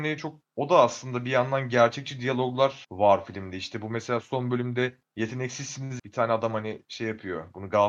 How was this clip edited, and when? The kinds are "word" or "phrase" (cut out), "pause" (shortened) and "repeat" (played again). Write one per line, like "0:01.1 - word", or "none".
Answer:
0:06.0 - phrase